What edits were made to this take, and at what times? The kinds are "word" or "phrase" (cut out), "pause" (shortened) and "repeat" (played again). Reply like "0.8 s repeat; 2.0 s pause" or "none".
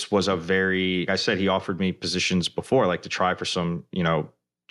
1.1 s word